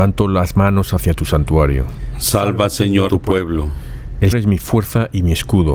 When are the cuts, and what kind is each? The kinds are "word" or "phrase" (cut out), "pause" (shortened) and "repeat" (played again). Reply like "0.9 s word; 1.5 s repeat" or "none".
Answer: 3.1 s word; 4.3 s word